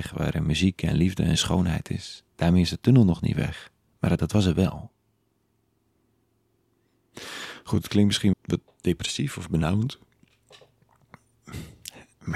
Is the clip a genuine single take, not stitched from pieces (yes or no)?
no